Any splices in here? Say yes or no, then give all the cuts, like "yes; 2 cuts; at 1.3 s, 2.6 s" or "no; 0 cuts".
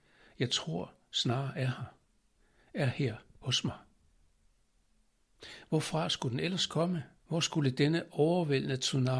yes; 1 cut; at 7.2 s